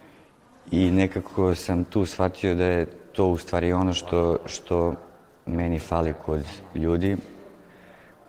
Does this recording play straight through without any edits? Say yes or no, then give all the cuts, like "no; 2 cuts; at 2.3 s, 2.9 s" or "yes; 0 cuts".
yes; 0 cuts